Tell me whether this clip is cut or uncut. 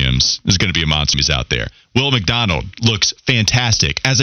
cut